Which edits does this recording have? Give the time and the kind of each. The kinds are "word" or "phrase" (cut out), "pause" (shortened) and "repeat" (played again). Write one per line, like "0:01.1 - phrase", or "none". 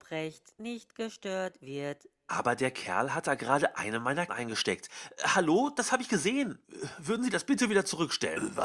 0:04.3 - word